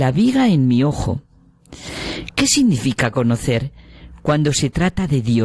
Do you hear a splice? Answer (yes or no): no